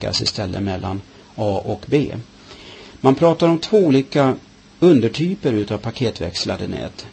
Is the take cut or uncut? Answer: uncut